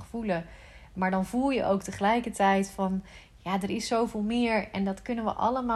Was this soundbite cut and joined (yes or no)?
no